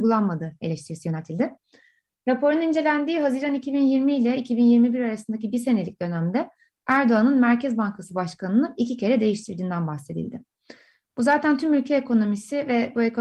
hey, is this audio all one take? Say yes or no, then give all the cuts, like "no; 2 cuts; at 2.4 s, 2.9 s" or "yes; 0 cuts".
yes; 0 cuts